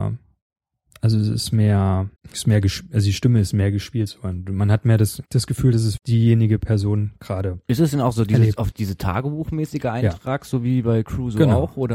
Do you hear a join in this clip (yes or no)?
yes